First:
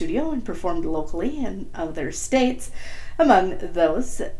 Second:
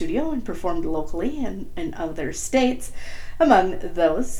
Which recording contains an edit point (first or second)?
first